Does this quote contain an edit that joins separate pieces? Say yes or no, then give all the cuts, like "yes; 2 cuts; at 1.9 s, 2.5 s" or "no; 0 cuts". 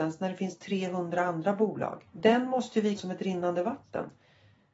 yes; 2 cuts; at 2.1 s, 3.0 s